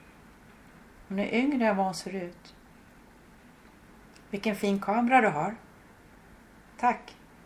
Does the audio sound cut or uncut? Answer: uncut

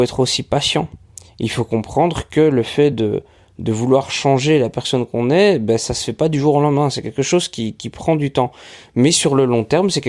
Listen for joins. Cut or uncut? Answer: uncut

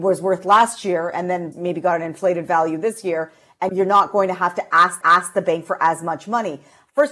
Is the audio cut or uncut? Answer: cut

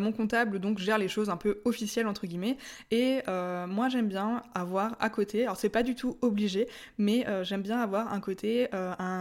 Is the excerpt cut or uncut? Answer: uncut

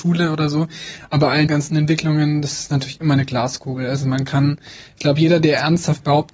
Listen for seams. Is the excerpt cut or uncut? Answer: cut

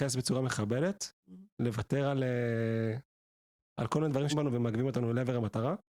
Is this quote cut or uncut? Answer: cut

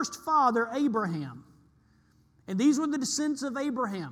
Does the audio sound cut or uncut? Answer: uncut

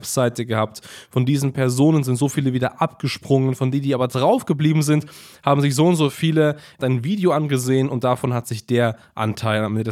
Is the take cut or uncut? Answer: uncut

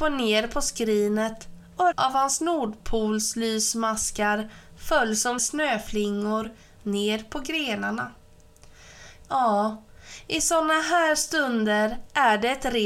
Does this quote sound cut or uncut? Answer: cut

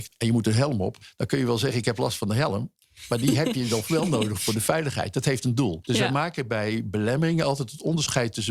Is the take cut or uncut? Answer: uncut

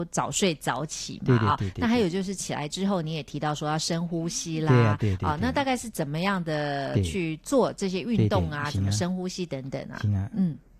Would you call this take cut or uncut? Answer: uncut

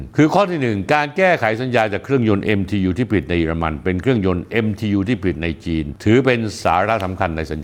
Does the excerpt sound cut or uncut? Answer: uncut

